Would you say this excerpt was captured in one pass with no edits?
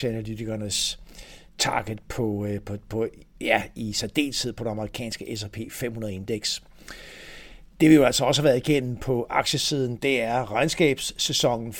yes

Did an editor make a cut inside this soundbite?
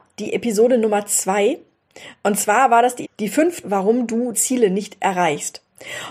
yes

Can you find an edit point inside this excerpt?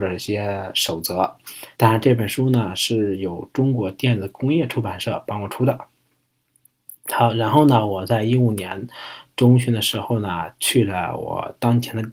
yes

